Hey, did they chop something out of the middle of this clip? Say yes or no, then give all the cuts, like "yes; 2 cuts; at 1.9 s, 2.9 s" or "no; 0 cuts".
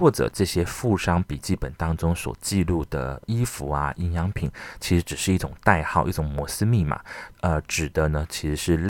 no; 0 cuts